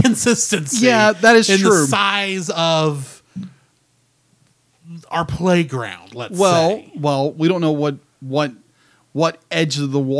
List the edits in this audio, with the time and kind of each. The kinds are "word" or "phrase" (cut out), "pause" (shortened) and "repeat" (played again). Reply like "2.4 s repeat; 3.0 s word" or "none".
none